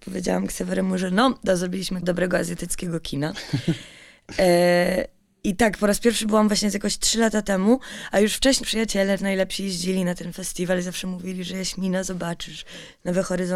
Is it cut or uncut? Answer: cut